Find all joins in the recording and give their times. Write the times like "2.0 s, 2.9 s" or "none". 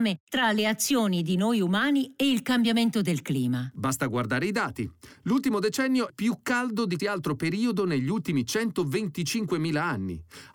6.1 s, 7.0 s